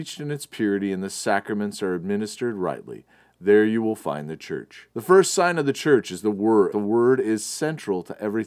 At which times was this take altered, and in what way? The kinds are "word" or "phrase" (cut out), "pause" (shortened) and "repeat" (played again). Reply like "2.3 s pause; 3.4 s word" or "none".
4.9 s pause; 6.7 s phrase